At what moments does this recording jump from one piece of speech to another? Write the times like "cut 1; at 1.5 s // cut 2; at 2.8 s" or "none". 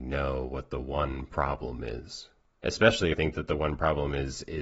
cut 1; at 3.1 s